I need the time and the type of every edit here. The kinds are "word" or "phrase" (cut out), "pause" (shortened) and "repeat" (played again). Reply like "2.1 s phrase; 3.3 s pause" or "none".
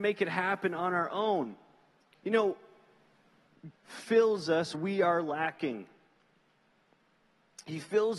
3.7 s word; 4.7 s word